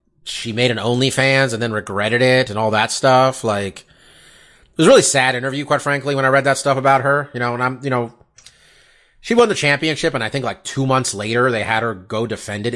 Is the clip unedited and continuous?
yes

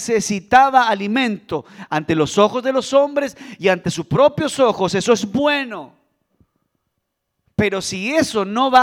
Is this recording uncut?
yes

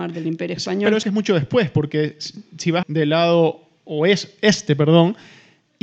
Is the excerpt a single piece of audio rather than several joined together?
no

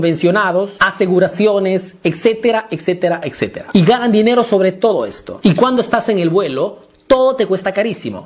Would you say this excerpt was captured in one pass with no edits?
yes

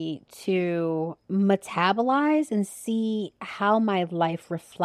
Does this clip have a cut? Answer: no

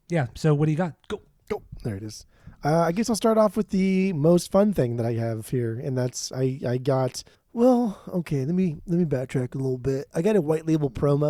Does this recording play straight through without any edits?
no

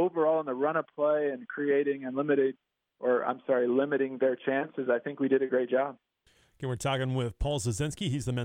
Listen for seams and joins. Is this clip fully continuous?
yes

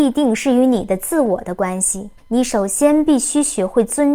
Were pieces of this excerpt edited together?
yes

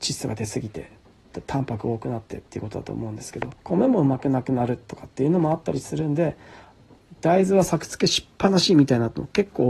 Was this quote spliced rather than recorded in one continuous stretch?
yes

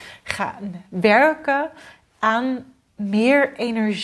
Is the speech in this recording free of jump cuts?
no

